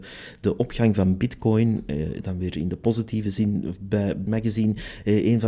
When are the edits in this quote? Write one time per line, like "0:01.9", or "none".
0:04.3